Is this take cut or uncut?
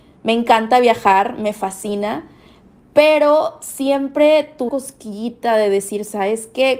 cut